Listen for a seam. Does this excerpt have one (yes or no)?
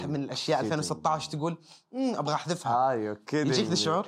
no